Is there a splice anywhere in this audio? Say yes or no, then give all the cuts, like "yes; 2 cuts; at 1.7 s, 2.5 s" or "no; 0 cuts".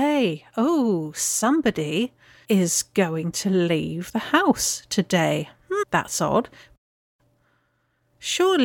no; 0 cuts